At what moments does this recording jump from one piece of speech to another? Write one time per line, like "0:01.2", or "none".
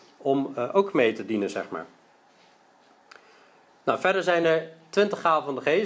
none